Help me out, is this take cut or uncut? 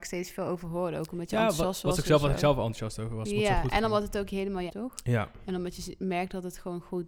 cut